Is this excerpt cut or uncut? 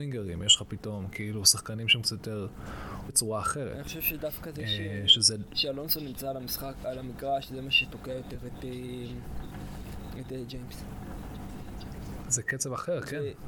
cut